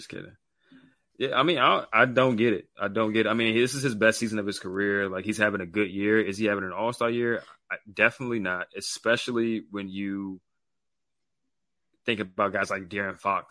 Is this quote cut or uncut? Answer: uncut